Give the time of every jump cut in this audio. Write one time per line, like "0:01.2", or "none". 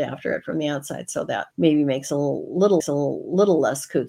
0:01.5
0:02.8